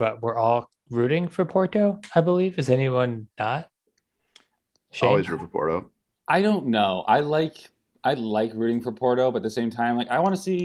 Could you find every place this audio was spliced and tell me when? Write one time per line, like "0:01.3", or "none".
none